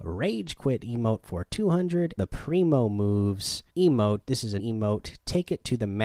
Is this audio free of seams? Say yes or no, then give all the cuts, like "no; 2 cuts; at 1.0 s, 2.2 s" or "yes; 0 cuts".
no; 3 cuts; at 2.2 s, 3.7 s, 4.6 s